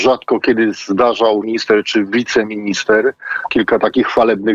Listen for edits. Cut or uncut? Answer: cut